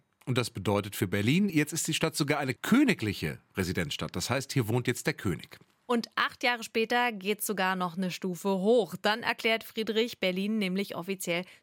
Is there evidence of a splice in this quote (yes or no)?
no